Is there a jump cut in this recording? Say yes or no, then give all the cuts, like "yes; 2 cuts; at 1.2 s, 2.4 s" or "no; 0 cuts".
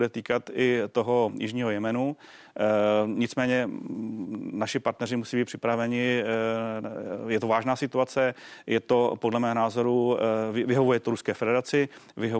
no; 0 cuts